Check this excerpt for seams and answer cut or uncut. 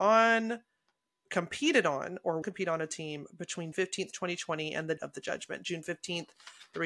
cut